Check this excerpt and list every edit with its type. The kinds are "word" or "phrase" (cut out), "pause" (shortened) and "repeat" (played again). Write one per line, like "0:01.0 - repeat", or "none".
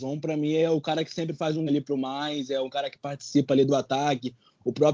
0:01.7 - word